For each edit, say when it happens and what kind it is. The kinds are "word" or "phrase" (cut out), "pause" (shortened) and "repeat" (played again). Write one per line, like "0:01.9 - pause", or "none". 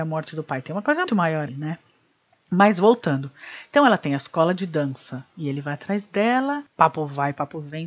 0:01.1 - word
0:01.5 - word